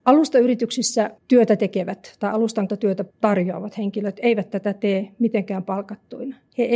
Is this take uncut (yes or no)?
no